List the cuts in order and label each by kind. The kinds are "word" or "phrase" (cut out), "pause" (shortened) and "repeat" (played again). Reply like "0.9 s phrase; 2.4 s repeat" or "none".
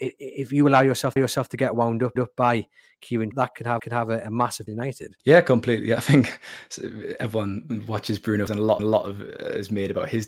1.2 s repeat; 2.2 s repeat; 3.3 s phrase; 3.8 s repeat; 4.7 s phrase; 5.2 s pause; 8.5 s word; 8.8 s repeat